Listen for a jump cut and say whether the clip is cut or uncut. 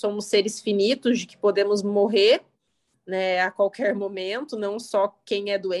uncut